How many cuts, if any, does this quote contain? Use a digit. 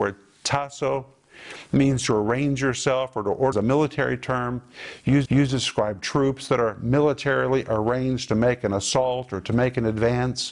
2